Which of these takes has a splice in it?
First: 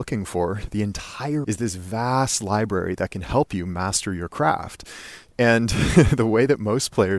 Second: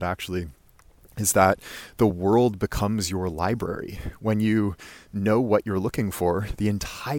first; 1 cut; at 1.4 s

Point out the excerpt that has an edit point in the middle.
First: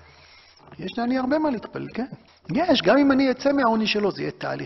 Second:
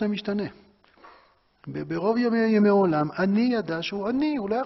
first; 1 cut; at 2.3 s

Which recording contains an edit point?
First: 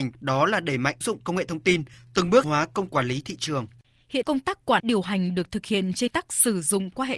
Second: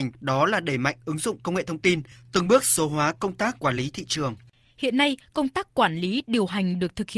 first; 6 cuts; at 1.0 s, 2.4 s, 2.9 s, 4.2 s, 4.8 s, 6.1 s

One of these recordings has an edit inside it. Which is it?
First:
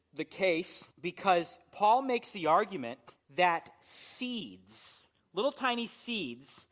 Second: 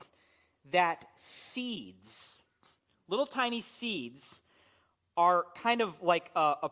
first; 3 cuts; at 0.9 s, 3.2 s, 5.1 s

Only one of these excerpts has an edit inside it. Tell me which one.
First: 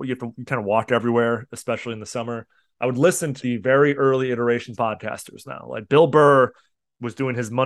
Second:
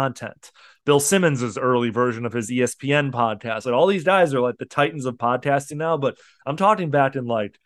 first; 2 cuts; at 3.4 s, 4.8 s

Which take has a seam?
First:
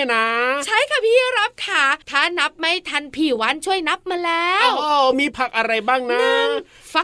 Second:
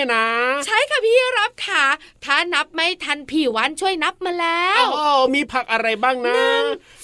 first; 1 cut; at 2.0 s

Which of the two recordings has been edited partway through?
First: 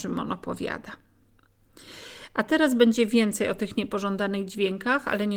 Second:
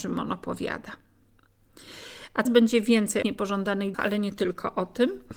second; 3 cuts; at 2.5 s, 3.2 s, 3.9 s

